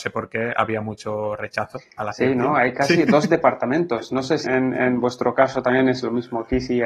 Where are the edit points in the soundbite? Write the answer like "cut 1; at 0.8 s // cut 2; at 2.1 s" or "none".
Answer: cut 1; at 4.4 s

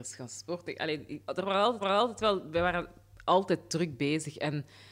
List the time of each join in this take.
cut 1; at 1.2 s // cut 2; at 1.8 s

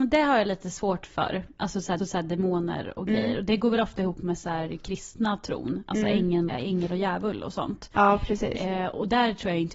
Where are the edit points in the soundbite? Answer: cut 1; at 2.0 s // cut 2; at 6.5 s

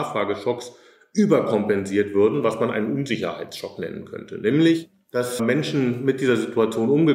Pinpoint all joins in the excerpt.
cut 1; at 5.4 s

